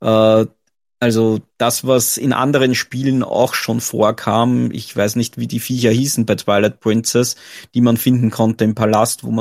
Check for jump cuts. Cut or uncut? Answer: uncut